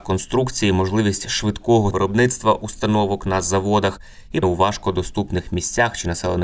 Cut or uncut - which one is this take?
cut